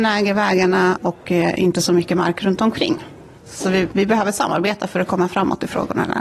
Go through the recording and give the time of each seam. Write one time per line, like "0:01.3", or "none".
0:03.4